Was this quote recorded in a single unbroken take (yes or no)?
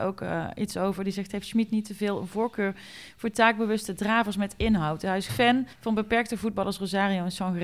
no